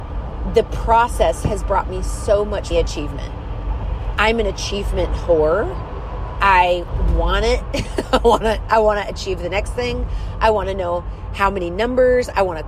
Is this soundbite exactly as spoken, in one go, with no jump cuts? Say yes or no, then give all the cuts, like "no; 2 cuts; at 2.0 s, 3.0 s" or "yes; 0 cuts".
no; 1 cut; at 2.7 s